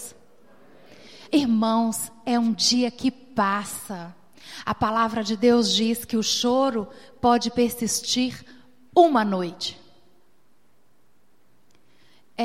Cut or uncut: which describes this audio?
uncut